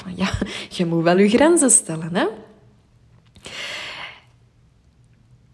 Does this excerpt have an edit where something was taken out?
no; 0 cuts

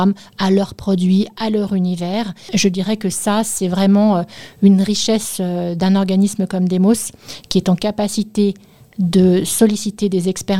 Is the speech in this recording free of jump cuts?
yes; 0 cuts

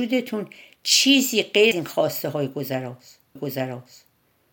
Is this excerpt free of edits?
no; 2 cuts; at 1.7 s, 3.4 s

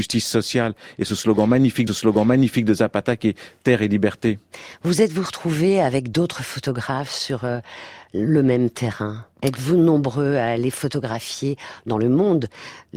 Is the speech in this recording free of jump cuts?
no; 2 cuts; at 1.9 s, 9.3 s

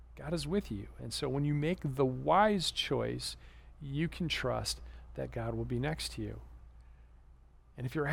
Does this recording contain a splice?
no; 0 cuts

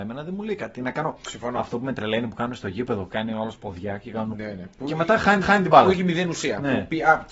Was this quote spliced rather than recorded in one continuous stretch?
yes; 2 cuts; at 4.3 s, 5.4 s

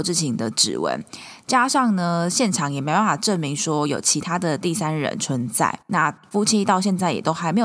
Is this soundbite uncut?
no; 1 cut; at 5.8 s

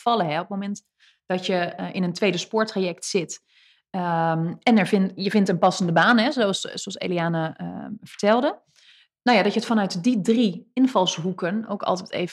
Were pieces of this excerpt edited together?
no; 0 cuts

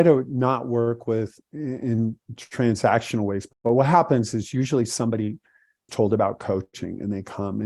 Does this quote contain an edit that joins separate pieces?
yes; 2 cuts; at 3.5 s, 5.9 s

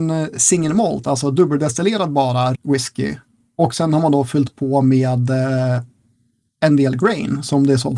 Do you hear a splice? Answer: yes; 1 cut; at 2.5 s

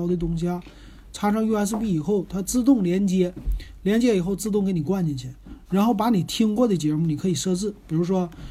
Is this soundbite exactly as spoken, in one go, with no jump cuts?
yes; 0 cuts

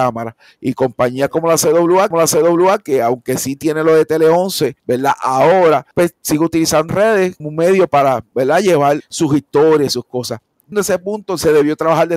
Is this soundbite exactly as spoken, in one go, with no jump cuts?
no; 7 cuts; at 2.1 s, 4.8 s, 5.9 s, 6.9 s, 7.4 s, 9.0 s, 10.7 s

